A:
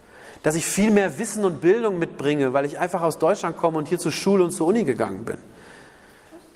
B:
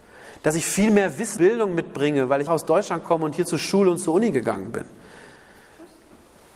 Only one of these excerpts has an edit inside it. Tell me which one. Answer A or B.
B